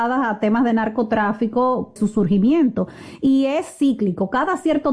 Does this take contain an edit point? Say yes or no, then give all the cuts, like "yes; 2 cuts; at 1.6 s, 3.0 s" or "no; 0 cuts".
yes; 1 cut; at 2.0 s